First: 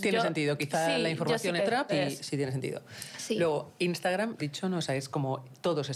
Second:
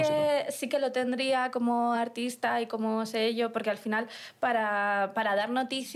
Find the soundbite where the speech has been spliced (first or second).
first